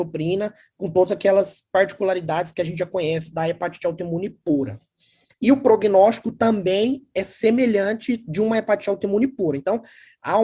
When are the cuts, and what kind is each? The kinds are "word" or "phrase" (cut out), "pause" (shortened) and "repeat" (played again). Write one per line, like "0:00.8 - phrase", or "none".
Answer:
none